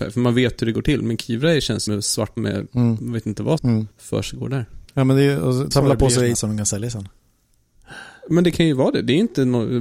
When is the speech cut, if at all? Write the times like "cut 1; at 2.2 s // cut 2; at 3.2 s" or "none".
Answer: cut 1; at 1.9 s // cut 2; at 2.4 s // cut 3; at 3.6 s // cut 4; at 3.9 s // cut 5; at 4.9 s // cut 6; at 5.7 s // cut 7; at 6.3 s